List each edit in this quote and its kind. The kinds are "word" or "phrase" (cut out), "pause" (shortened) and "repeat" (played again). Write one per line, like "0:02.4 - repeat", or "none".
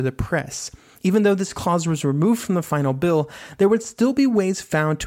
none